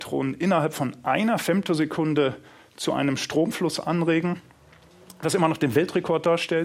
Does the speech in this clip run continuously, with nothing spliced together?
yes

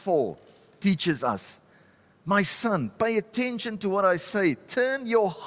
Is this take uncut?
yes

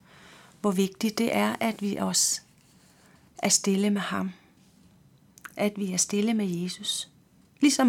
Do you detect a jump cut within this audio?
no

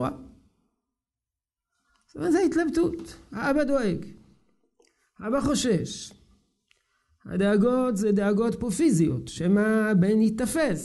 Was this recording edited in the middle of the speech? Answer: no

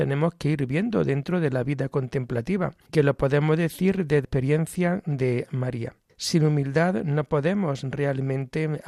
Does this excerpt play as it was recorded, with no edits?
no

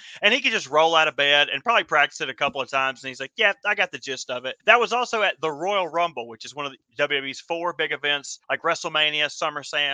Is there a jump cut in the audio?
yes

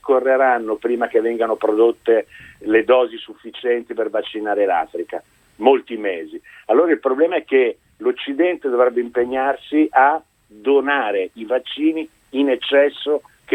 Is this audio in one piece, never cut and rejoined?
yes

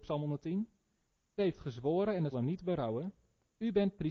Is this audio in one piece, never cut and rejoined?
no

